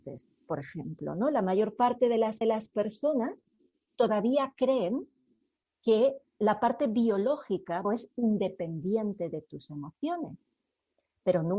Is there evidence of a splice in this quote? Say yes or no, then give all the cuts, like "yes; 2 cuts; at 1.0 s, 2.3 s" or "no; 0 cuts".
yes; 3 cuts; at 2.4 s, 6.3 s, 7.8 s